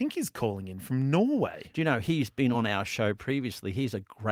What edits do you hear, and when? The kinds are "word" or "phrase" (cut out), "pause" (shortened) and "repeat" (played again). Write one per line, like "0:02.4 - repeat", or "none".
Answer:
none